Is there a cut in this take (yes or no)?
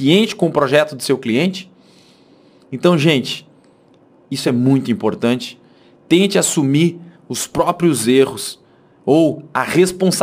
no